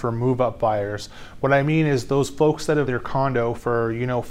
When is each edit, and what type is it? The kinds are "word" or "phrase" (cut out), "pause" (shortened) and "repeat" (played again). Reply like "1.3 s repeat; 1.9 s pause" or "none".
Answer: 2.9 s word